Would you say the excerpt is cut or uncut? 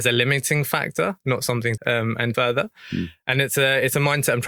cut